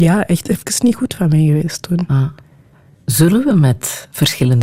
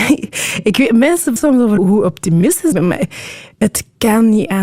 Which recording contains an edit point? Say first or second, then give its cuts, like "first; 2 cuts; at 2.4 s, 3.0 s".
second; 3 cuts; at 1.4 s, 1.8 s, 2.7 s